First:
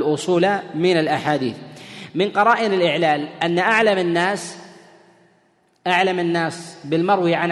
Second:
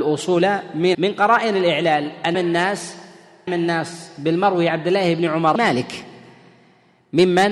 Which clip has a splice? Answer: second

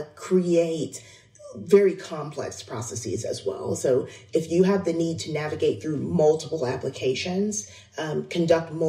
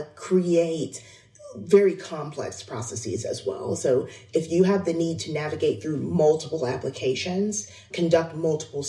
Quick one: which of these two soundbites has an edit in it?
second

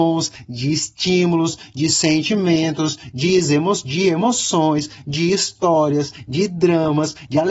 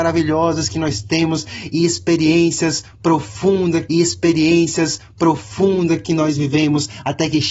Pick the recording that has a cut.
second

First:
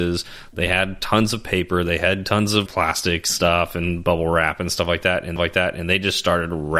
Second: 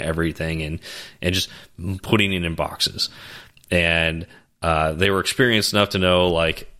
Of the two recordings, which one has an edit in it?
first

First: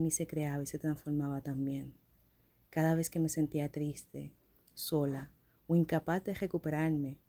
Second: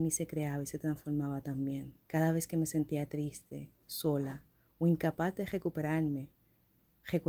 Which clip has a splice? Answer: second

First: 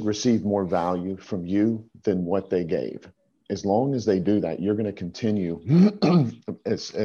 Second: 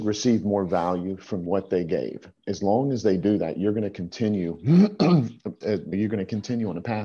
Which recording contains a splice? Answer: second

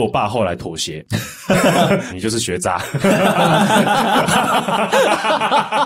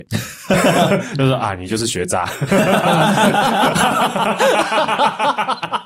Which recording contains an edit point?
first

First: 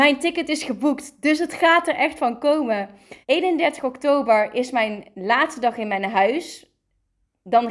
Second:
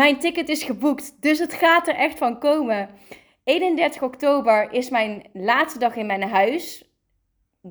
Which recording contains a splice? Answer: first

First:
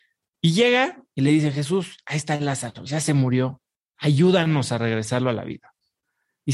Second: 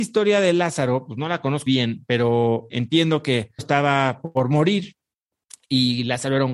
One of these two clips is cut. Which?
second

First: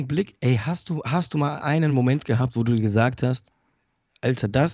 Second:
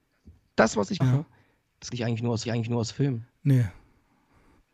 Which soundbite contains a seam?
second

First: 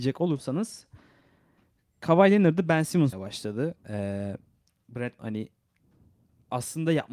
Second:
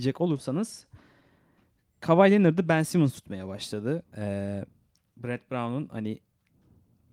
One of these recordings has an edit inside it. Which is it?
first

